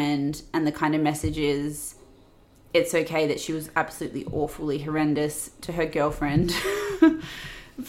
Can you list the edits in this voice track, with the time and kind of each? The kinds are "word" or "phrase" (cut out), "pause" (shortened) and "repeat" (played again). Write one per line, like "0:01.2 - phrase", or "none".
none

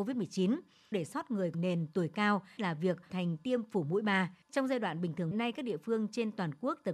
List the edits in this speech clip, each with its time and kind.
0:00.9 - word
0:01.5 - word
0:02.6 - word
0:03.1 - word
0:04.4 - pause
0:05.3 - phrase

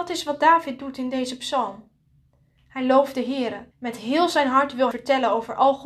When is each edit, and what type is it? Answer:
0:03.7 - pause
0:04.9 - word

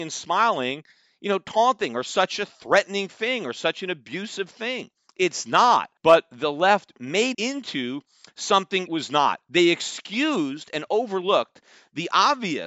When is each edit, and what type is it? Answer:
0:06.0 - pause
0:07.3 - word
0:08.9 - word

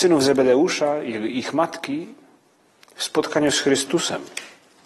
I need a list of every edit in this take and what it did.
none

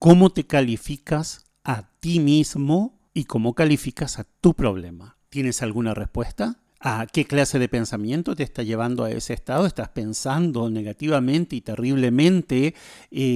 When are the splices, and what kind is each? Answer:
0:03.1 - pause
0:05.3 - pause
0:06.7 - pause

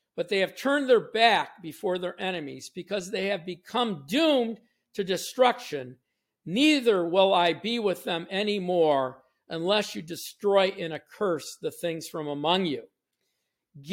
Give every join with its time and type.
none

